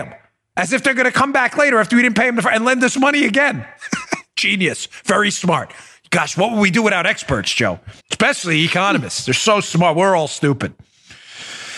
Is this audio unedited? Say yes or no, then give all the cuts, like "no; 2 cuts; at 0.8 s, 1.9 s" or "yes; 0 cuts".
no; 1 cut; at 8.0 s